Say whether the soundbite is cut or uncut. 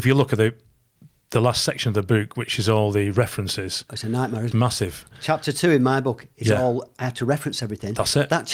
cut